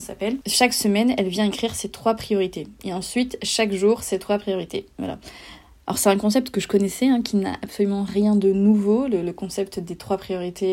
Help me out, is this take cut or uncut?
uncut